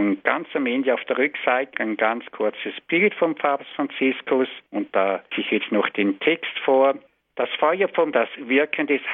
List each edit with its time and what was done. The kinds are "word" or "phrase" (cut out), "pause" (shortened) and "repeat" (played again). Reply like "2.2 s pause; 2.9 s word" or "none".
1.7 s word; 4.7 s pause; 5.3 s word; 7.1 s pause; 8.1 s word